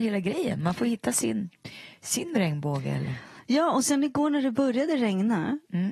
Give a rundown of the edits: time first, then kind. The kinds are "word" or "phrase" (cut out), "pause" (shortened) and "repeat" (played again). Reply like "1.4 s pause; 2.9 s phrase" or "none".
none

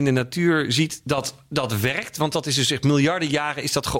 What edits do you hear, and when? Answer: none

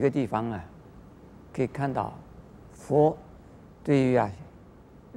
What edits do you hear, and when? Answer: 3.7 s pause

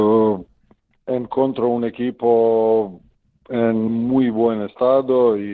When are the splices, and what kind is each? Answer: 3.9 s word

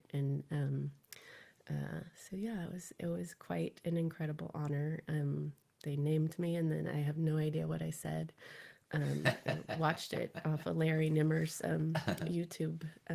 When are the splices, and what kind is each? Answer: none

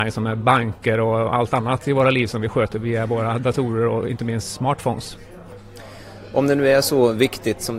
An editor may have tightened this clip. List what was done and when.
none

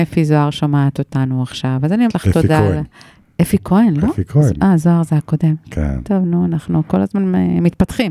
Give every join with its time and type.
2.1 s word

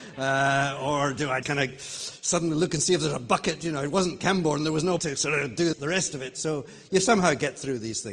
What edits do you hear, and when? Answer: 1.4 s word; 5.0 s word; 5.7 s word

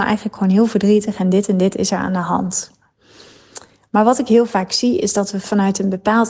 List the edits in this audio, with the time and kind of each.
none

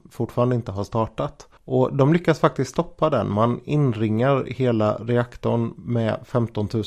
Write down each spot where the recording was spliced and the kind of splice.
1.6 s pause

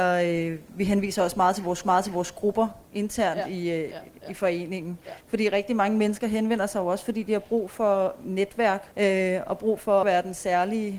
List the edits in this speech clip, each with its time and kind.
1.8 s repeat; 5.2 s pause; 8.9 s pause; 10.0 s phrase

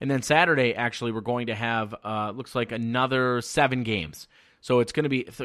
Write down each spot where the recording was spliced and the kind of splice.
none

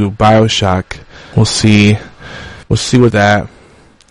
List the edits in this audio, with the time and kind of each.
1.3 s word; 2.6 s pause; 3.1 s phrase

